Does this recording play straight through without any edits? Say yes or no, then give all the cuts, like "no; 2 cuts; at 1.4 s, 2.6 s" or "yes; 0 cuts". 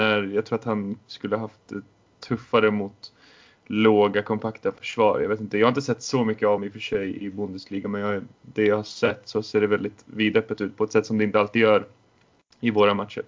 no; 1 cut; at 6.6 s